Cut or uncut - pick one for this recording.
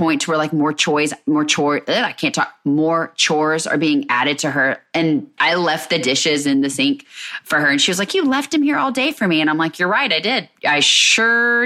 cut